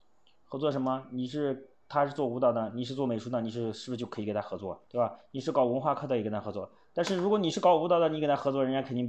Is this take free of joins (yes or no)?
no